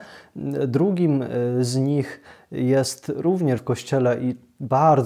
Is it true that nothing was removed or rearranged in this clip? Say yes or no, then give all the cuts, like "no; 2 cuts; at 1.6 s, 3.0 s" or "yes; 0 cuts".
no; 1 cut; at 3.6 s